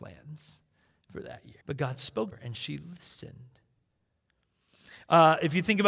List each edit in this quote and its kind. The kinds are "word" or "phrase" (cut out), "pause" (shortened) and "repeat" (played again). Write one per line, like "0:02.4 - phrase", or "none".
0:01.6 - pause
0:02.3 - word